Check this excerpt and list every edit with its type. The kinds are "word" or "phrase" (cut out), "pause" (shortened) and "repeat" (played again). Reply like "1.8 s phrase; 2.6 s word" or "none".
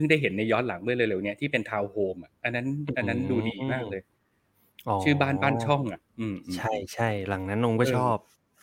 2.4 s pause; 6.1 s pause

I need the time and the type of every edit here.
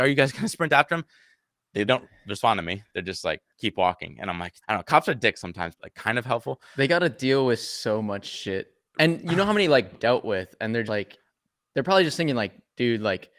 1.9 s word; 3.5 s pause; 4.6 s pause; 5.8 s phrase; 9.9 s phrase; 10.9 s word

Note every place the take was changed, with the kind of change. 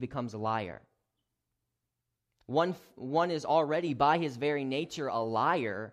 none

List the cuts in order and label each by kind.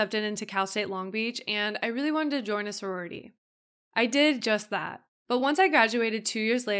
none

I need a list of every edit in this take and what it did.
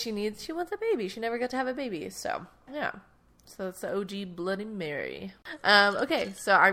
2.7 s word

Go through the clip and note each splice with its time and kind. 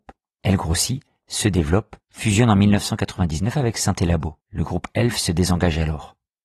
2.0 s pause; 4.4 s pause

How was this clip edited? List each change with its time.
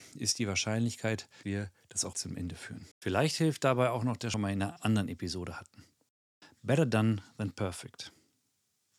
1.4 s phrase; 2.1 s word; 2.9 s pause; 4.3 s phrase

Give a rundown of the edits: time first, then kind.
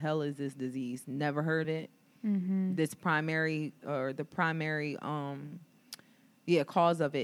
1.6 s word; 3.8 s word

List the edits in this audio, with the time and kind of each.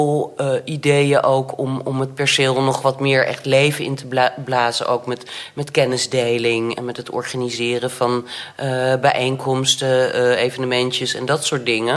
6.7 s word

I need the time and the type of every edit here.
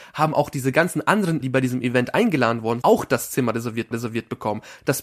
1.4 s word; 2.8 s word; 3.9 s repeat

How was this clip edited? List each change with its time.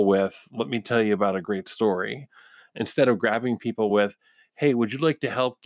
none

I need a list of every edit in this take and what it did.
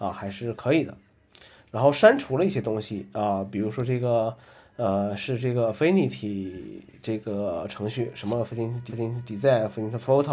7.0 s word; 8.9 s repeat

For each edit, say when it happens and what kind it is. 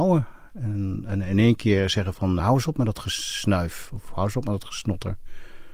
2.4 s word

